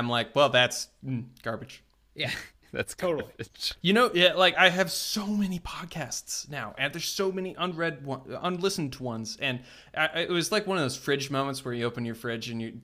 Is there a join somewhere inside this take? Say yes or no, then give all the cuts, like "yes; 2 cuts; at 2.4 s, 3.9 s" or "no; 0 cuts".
no; 0 cuts